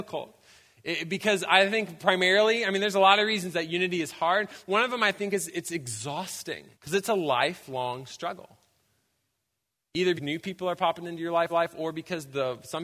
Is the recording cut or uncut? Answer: cut